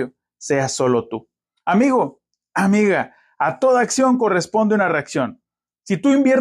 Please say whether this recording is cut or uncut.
uncut